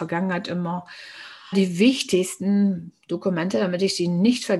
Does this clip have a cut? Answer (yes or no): yes